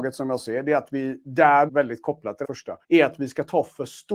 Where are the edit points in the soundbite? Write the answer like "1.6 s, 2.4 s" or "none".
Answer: 1.7 s, 2.4 s, 2.8 s